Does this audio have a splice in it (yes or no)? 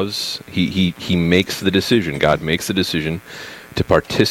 no